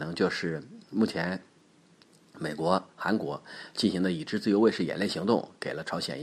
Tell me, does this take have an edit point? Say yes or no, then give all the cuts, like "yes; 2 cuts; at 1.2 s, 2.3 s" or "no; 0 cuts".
no; 0 cuts